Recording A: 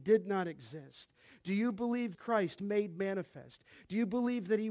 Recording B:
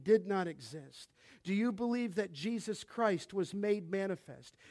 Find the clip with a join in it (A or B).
A